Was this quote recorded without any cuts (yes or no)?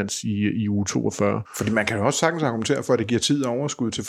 no